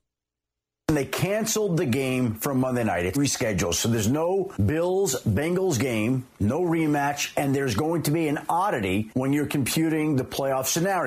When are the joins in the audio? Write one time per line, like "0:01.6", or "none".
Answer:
0:03.1